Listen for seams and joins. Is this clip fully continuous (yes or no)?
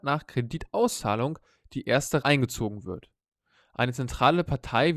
no